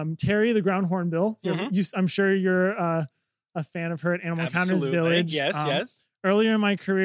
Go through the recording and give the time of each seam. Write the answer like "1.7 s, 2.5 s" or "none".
none